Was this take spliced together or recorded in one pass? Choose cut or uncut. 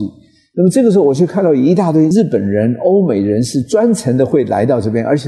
uncut